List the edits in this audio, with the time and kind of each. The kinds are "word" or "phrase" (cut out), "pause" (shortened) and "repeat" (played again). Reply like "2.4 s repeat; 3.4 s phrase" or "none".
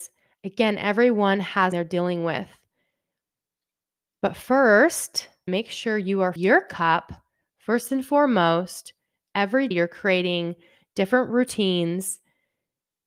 1.7 s word; 5.5 s word; 6.4 s word; 9.7 s word